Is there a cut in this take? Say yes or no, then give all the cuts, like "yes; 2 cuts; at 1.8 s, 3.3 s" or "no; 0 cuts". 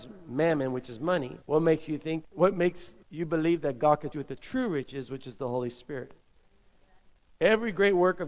yes; 5 cuts; at 1.4 s, 2.2 s, 3.0 s, 4.1 s, 7.2 s